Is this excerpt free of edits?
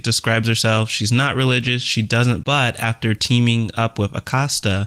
no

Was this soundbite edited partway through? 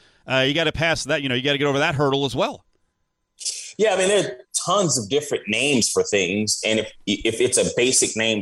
no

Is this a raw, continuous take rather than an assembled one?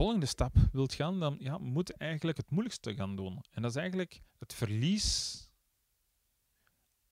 no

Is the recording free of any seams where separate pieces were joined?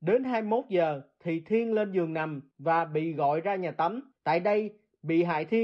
no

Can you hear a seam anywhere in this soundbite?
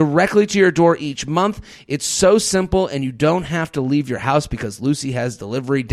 no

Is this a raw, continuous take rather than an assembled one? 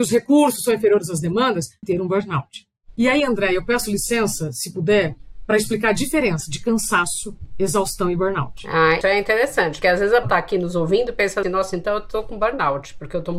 no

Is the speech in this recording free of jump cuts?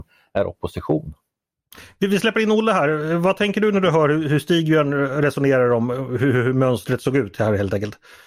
yes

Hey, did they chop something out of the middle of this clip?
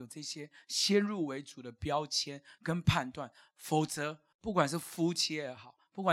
yes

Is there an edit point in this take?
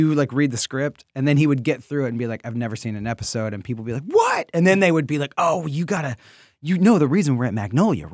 no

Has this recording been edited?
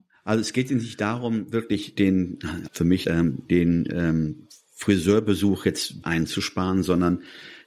yes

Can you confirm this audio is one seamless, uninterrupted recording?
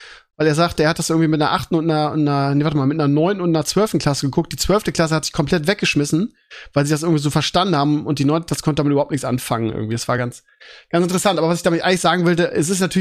yes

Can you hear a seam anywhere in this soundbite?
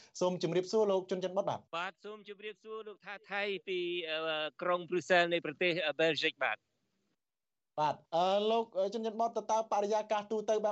yes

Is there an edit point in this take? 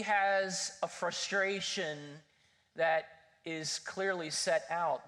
no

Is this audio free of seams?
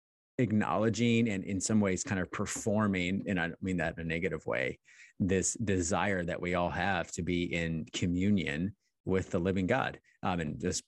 yes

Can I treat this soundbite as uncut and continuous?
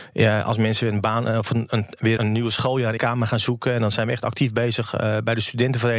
no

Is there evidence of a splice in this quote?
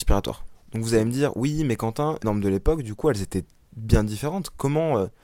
yes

